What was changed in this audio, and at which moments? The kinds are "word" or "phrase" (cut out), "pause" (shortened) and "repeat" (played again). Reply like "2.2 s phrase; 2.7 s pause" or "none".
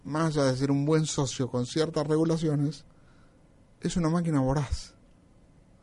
none